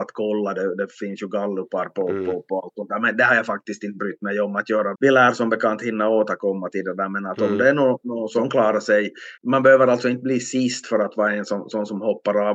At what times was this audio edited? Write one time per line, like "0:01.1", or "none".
0:04.9
0:09.4